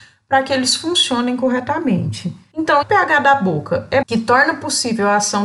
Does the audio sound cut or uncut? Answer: cut